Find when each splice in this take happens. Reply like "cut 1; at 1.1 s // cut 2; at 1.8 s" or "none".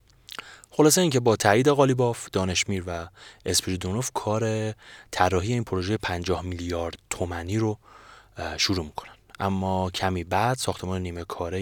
none

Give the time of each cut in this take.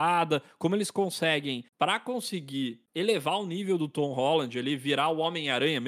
cut 1; at 1.7 s // cut 2; at 2.9 s

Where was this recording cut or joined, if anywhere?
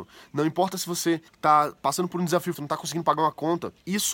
cut 1; at 1.3 s // cut 2; at 2.5 s

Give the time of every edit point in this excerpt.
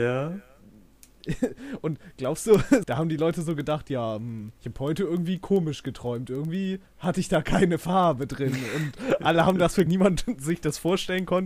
cut 1; at 2.8 s // cut 2; at 4.6 s // cut 3; at 9.9 s

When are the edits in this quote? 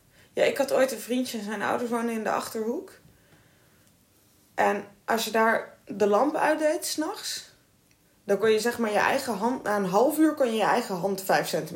none

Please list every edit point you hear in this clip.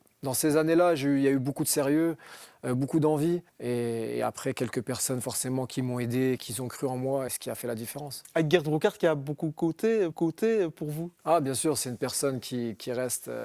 cut 1; at 3.5 s // cut 2; at 6.4 s // cut 3; at 7.3 s // cut 4; at 10.1 s // cut 5; at 11.2 s

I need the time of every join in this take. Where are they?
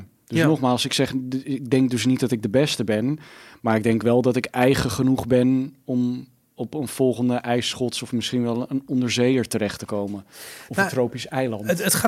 none

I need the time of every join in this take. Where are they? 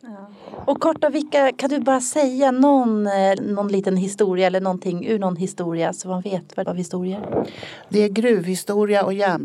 cut 1; at 3.4 s // cut 2; at 6.6 s

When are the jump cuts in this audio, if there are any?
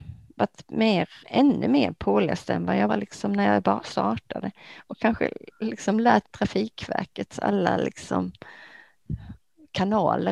cut 1; at 1.2 s // cut 2; at 2.9 s // cut 3; at 6.2 s

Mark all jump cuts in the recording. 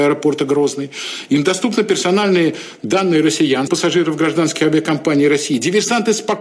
cut 1; at 3.7 s

